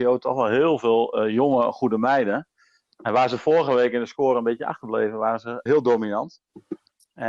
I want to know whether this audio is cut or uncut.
cut